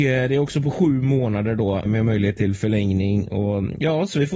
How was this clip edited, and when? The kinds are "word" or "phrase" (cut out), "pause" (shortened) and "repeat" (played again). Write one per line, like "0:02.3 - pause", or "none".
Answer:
0:01.9 - word